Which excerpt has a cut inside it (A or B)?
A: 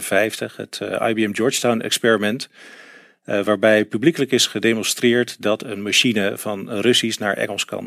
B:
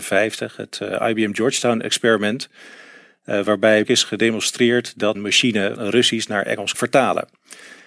B